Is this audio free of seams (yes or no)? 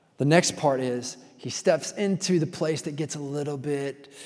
yes